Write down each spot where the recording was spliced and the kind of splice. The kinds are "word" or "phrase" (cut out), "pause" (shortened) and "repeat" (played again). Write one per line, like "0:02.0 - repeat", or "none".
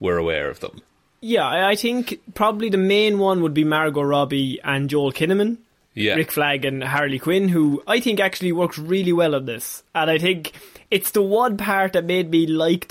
none